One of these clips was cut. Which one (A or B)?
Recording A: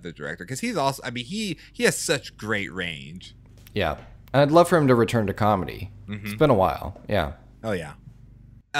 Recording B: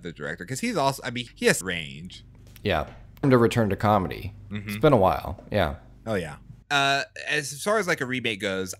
B